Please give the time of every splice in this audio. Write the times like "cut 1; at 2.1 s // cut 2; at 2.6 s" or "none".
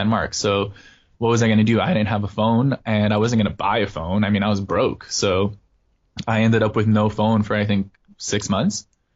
none